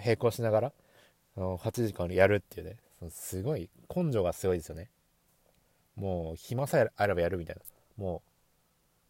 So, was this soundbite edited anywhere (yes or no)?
no